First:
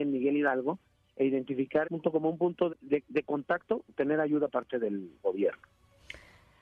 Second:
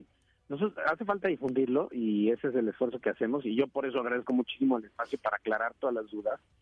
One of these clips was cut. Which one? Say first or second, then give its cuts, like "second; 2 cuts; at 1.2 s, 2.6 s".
first; 4 cuts; at 1.8 s, 2.7 s, 3.9 s, 4.5 s